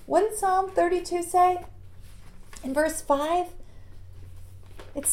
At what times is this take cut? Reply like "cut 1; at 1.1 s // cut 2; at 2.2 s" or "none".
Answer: none